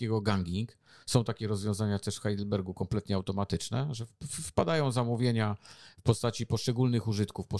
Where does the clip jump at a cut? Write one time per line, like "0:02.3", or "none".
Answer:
none